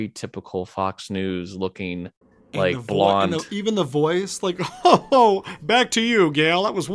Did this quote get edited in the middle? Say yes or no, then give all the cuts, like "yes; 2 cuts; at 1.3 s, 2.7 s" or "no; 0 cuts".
no; 0 cuts